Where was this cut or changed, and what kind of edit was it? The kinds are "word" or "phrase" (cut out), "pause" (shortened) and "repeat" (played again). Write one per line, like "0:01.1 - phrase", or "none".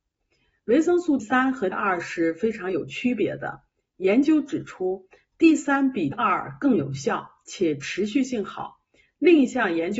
0:01.2 - word
0:01.7 - word
0:06.1 - word